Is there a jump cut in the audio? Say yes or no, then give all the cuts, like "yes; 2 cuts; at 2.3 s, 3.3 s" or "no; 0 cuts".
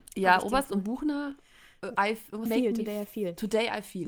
yes; 1 cut; at 2.5 s